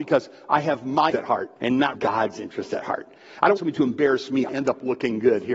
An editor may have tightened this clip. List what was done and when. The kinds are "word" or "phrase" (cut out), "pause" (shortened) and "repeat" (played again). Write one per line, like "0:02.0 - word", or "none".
0:01.1 - word
0:01.6 - pause
0:01.9 - word
0:03.6 - word
0:04.5 - word